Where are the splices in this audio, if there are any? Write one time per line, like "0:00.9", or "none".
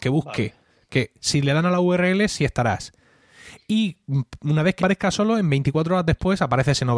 0:04.8

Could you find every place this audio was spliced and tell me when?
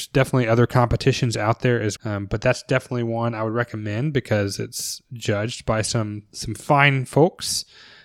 0:02.0

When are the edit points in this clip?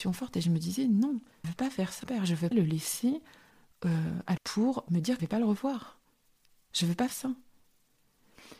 0:01.4
0:02.0
0:02.5
0:04.4
0:04.9
0:05.2
0:07.1

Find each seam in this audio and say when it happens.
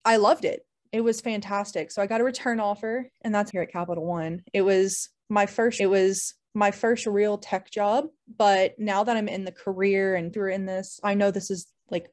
0:03.5
0:05.8
0:08.2
0:10.3

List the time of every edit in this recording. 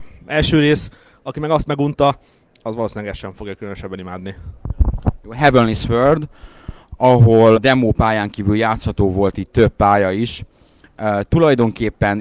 0:07.5

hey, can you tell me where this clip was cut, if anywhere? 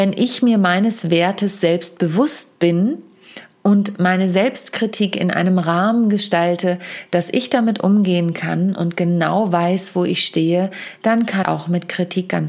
0:11.4

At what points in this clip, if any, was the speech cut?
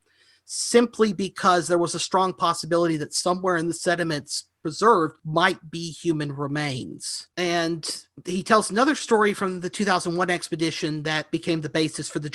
0:05.2
0:07.3

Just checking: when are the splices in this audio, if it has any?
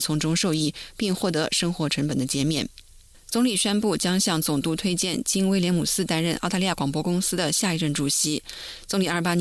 none

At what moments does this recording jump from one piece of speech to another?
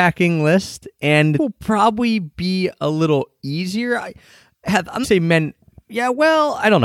0:01.4
0:05.0

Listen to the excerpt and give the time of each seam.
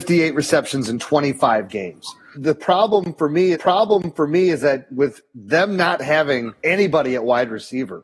0:02.3
0:03.5
0:05.3
0:06.6

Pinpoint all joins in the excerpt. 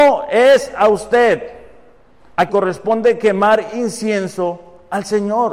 0:02.5

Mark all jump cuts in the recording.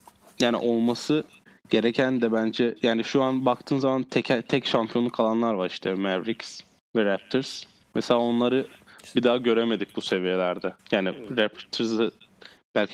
0:06.8
0:10.8

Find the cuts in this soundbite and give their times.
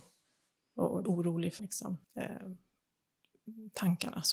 0:01.0
0:01.6
0:02.0

